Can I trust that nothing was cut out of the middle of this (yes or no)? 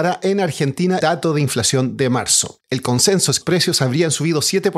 no